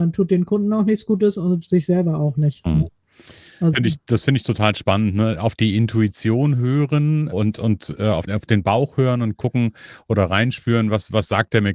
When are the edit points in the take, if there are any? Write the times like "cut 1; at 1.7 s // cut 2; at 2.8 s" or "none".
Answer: cut 1; at 3.7 s // cut 2; at 7.3 s // cut 3; at 8.3 s

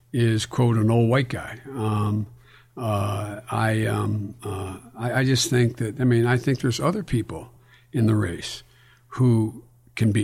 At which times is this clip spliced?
none

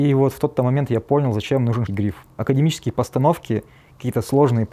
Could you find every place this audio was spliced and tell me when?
cut 1; at 1.9 s

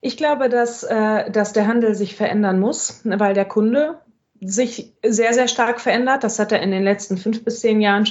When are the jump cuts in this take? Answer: cut 1; at 5.0 s

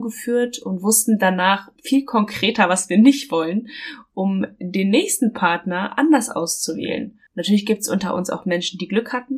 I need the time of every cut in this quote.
cut 1; at 1.8 s // cut 2; at 7.3 s

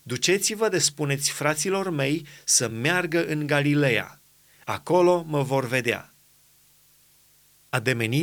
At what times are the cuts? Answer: none

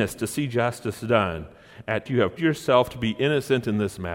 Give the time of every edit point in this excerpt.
cut 1; at 2.1 s // cut 2; at 2.4 s

